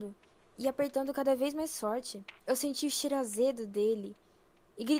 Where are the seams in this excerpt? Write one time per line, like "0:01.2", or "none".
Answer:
0:02.4